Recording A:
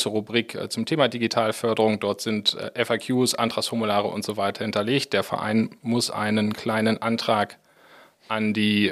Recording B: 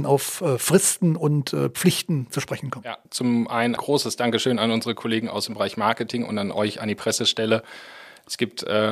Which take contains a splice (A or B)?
B